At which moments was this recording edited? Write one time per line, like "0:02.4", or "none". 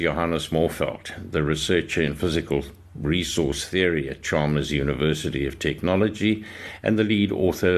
none